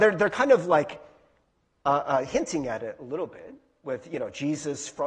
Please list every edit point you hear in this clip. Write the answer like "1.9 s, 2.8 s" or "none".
none